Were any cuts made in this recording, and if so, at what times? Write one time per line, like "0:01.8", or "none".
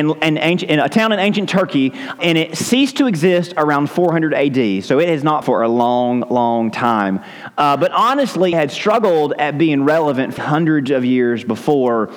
0:02.2
0:05.4
0:08.5
0:10.4